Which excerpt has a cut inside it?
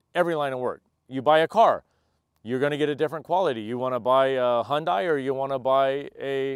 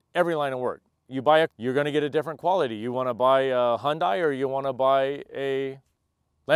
second; 1 cut; at 1.5 s

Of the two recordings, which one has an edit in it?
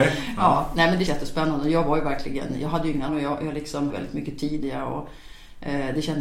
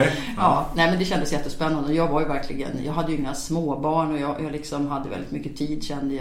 first; 4 cuts; at 1.1 s, 3.1 s, 3.9 s, 4.6 s

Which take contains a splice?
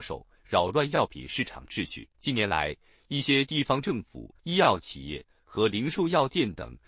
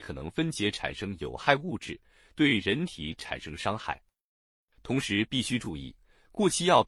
first; 2 cuts; at 2.1 s, 4.4 s

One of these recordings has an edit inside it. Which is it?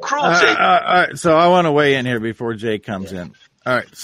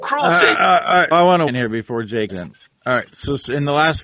second; 3 cuts; at 1.1 s, 1.5 s, 2.3 s

